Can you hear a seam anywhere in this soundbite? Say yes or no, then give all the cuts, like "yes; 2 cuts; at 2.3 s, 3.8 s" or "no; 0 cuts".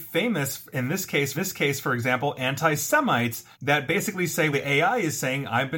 yes; 3 cuts; at 1.3 s, 3.5 s, 4.5 s